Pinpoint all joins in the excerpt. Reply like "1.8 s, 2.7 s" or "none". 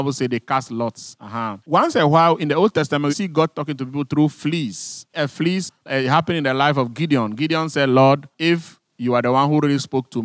1.6 s, 3.1 s, 5.1 s